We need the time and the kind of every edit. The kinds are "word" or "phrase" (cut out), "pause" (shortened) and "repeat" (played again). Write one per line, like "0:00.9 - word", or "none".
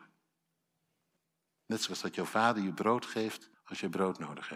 0:01.2 - pause
0:01.9 - word
0:03.5 - pause